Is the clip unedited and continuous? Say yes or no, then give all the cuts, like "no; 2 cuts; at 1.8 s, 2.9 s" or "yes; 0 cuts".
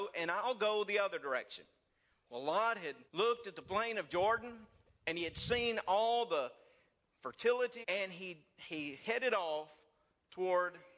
no; 2 cuts; at 3.1 s, 7.8 s